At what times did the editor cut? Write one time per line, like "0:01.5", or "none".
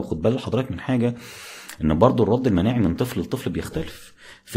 none